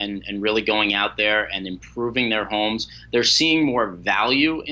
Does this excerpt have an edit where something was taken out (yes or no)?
no